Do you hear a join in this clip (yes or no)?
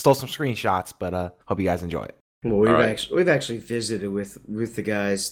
yes